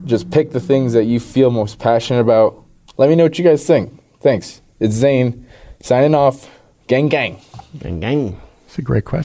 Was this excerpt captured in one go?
yes; 0 cuts

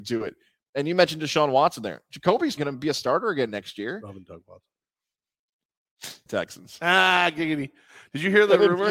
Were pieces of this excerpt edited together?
yes; 2 cuts; at 2.6 s, 6.3 s

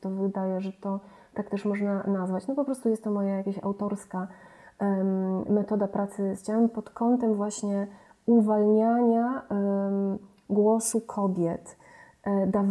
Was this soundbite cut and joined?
yes; 1 cut; at 6.4 s

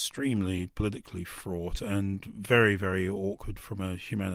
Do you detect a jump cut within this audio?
no; 0 cuts

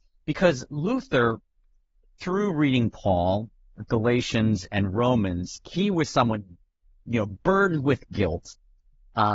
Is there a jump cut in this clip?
no; 0 cuts

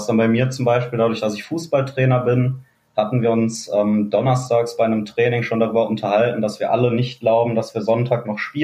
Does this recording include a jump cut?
no; 0 cuts

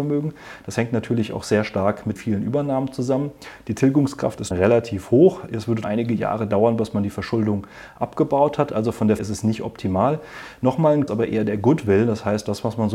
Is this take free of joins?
no; 5 cuts; at 2.2 s, 4.5 s, 5.8 s, 9.2 s, 11.1 s

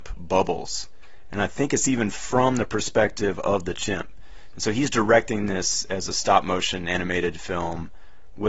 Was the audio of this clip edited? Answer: no; 0 cuts

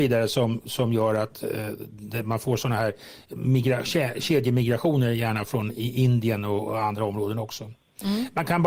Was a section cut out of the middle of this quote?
no; 0 cuts

